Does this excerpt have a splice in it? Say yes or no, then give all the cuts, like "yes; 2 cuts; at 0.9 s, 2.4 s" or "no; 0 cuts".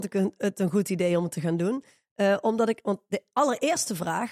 no; 0 cuts